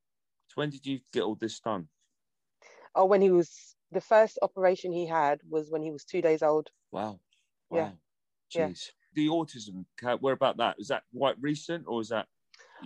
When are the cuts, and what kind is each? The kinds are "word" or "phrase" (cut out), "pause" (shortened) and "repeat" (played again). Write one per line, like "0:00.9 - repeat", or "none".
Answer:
none

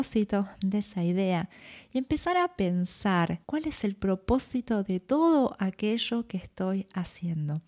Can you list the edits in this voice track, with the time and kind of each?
0:03.4 - pause

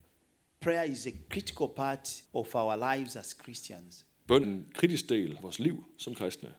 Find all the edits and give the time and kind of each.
0:02.3 - pause
0:04.4 - word
0:05.4 - word

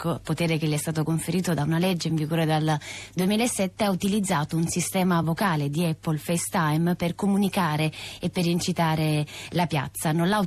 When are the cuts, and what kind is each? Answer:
none

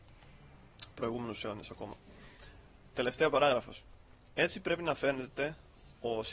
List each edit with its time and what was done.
none

